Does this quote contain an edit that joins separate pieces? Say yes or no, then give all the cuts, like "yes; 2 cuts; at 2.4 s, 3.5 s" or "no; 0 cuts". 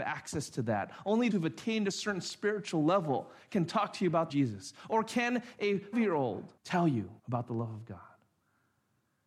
yes; 5 cuts; at 1.3 s, 4.3 s, 5.9 s, 6.6 s, 7.2 s